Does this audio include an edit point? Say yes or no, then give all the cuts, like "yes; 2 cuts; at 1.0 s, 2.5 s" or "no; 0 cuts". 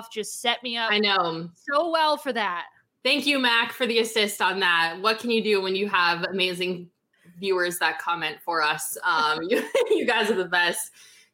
no; 0 cuts